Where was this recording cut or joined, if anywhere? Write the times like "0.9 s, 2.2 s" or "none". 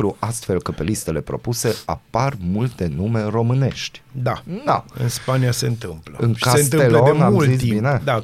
none